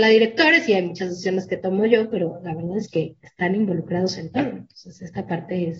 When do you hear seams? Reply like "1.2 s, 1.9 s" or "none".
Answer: none